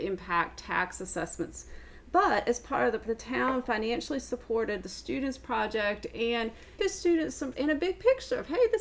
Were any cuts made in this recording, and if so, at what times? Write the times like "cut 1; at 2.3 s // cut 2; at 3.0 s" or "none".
cut 1; at 3.0 s // cut 2; at 6.8 s // cut 3; at 7.5 s